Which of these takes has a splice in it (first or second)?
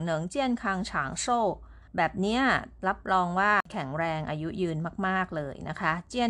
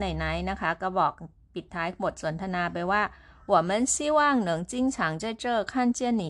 first